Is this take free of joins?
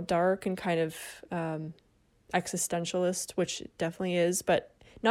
yes; 0 cuts

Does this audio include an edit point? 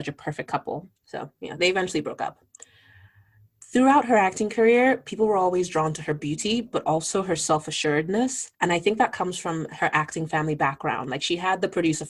yes; 2 cuts; at 1.0 s, 8.5 s

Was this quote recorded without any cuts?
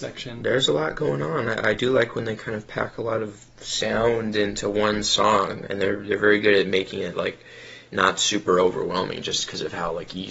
yes; 0 cuts

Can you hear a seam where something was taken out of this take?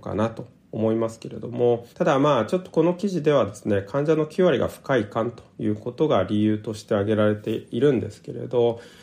yes; 1 cut; at 1.9 s

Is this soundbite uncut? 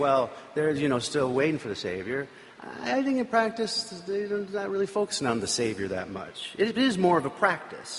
yes; 0 cuts

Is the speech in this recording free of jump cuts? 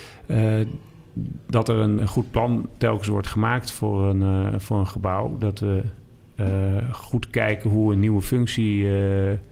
no; 1 cut; at 2.0 s

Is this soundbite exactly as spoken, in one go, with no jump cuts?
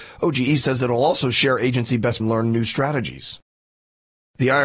no; 1 cut; at 2.2 s

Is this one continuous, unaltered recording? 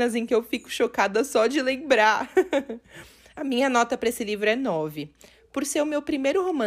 yes; 0 cuts

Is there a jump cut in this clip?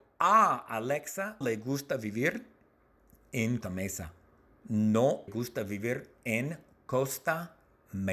yes; 3 cuts; at 1.4 s, 3.6 s, 5.3 s

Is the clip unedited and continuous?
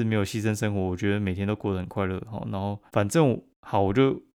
no; 1 cut; at 2.9 s

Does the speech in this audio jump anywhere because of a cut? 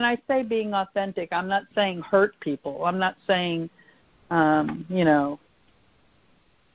no; 0 cuts

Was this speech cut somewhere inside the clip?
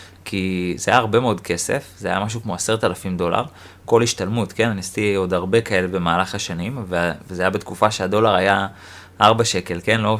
no; 0 cuts

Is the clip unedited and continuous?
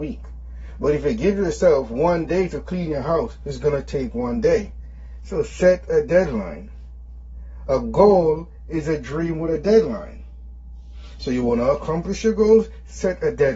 yes; 0 cuts

